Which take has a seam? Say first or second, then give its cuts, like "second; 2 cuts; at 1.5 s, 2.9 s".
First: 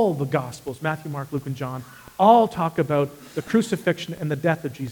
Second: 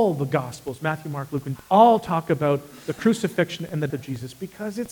second; 2 cuts; at 1.6 s, 3.9 s